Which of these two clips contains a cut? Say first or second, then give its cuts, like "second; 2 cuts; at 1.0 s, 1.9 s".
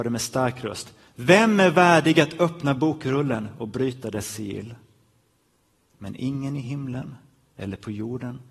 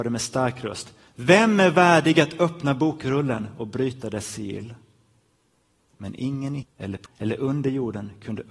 second; 2 cuts; at 6.6 s, 7.1 s